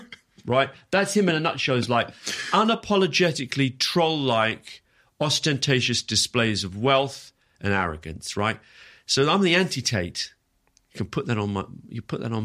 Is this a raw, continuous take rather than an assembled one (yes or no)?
yes